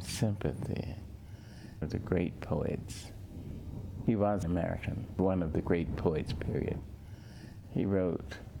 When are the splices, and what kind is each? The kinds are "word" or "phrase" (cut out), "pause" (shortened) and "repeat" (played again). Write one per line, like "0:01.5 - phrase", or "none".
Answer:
0:01.8 - word
0:04.4 - word